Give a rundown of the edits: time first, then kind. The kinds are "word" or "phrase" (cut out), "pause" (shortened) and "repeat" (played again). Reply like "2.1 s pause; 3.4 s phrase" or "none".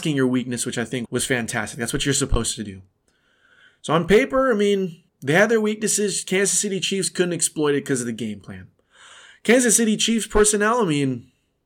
1.1 s word; 5.1 s pause